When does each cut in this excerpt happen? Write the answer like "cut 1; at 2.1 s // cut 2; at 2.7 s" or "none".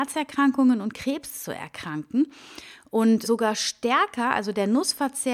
cut 1; at 3.2 s